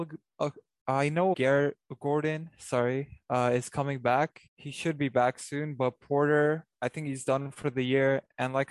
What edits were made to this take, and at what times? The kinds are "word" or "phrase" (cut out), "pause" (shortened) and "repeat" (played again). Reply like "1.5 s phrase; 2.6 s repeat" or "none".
1.3 s word; 4.5 s pause